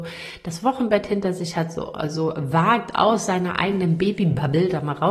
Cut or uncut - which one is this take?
uncut